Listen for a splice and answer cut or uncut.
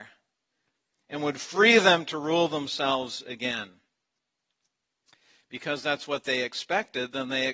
uncut